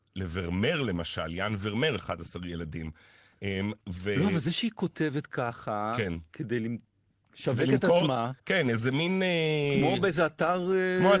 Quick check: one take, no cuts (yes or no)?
no